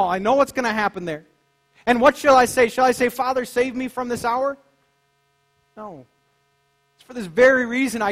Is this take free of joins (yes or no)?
yes